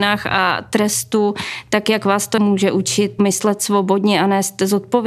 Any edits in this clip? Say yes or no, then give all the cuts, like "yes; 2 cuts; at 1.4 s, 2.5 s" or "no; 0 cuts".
no; 0 cuts